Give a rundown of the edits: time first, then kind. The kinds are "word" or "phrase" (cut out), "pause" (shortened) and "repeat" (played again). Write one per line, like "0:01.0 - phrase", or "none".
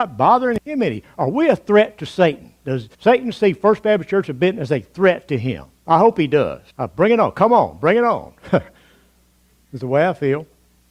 0:02.9 - pause
0:06.7 - pause